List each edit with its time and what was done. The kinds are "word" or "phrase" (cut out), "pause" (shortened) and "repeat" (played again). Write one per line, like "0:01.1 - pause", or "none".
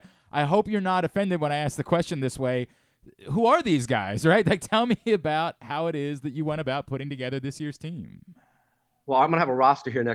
none